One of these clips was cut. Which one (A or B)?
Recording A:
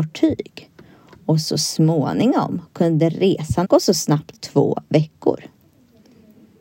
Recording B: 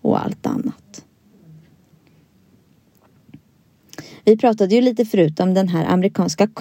A